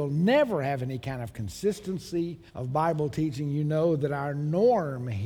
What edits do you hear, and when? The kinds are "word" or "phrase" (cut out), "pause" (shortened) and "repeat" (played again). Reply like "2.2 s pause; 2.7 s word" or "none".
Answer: 2.5 s pause